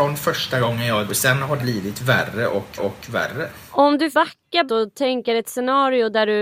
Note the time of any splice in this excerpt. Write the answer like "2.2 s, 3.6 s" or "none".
1.1 s, 1.6 s, 2.8 s, 4.1 s, 4.7 s